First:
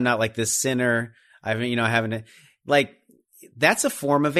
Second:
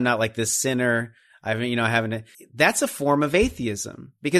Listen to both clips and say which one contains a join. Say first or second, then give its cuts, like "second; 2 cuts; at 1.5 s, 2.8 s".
second; 1 cut; at 2.3 s